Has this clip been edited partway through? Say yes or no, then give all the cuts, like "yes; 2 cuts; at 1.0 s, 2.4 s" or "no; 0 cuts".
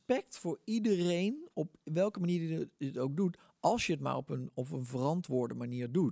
no; 0 cuts